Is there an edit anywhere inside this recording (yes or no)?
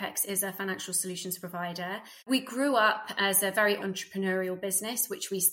yes